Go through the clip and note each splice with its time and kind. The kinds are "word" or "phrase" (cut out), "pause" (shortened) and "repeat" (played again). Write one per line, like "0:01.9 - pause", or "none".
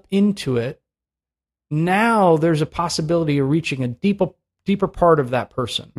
none